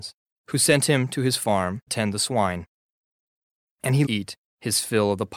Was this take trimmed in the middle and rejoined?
yes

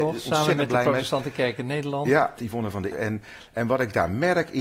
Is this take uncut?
no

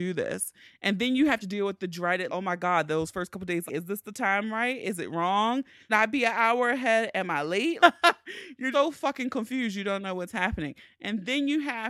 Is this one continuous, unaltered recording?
no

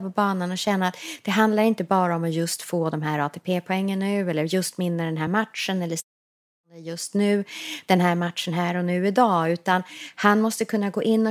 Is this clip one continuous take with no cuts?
yes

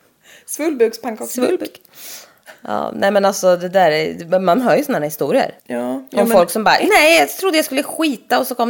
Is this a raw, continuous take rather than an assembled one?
no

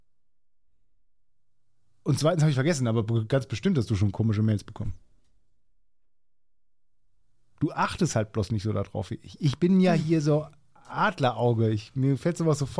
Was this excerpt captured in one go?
yes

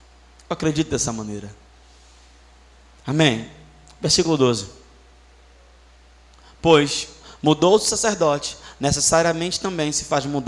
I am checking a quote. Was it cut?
no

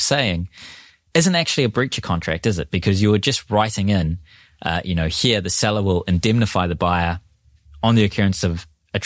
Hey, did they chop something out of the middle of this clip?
no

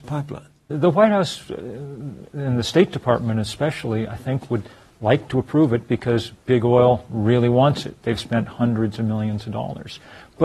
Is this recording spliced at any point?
no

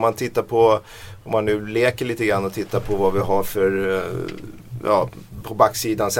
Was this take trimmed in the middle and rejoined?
no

